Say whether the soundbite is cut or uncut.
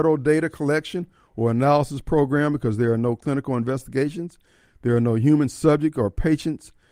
uncut